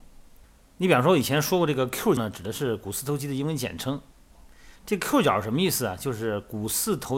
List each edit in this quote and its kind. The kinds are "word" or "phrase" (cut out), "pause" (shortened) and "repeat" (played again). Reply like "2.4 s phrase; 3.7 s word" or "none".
2.2 s phrase; 4.8 s pause